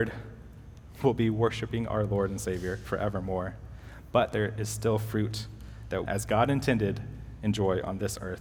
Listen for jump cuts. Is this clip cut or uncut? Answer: cut